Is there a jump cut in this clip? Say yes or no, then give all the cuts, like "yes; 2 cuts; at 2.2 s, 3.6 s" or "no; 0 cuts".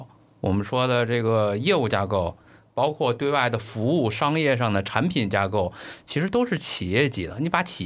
no; 0 cuts